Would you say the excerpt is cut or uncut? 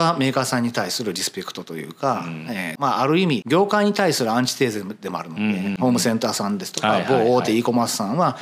uncut